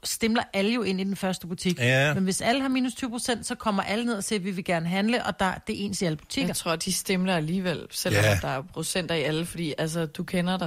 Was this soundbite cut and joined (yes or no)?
no